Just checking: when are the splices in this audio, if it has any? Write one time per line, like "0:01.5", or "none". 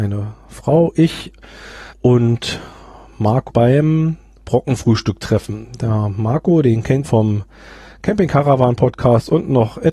0:01.9
0:03.5
0:07.0